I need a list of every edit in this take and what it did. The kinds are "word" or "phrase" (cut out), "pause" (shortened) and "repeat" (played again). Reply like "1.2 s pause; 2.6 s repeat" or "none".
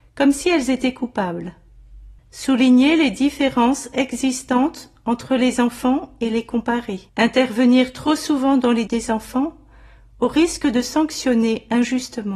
2.2 s pause; 7.1 s pause; 8.9 s word